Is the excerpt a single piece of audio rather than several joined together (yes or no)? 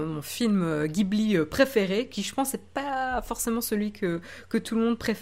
yes